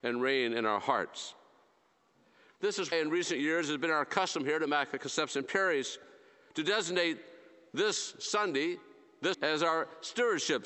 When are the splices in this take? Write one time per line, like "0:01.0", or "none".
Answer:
0:02.9
0:09.3

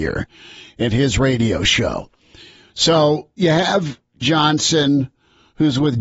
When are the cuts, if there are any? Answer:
0:04.2

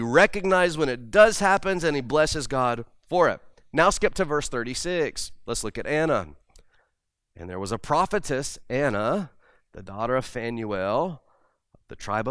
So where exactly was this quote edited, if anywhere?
none

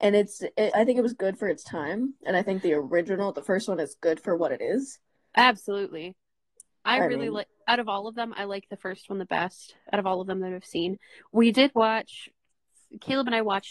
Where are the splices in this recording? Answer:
none

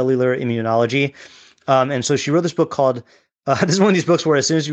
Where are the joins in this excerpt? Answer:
none

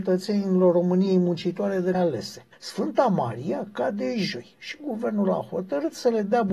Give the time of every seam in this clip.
0:01.9
0:02.5

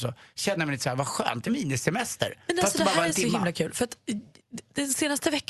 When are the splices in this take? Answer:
0:01.5

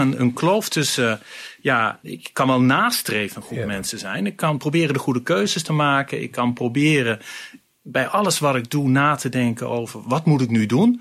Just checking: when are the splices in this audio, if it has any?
0:02.0

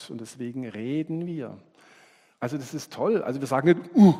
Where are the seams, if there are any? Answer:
none

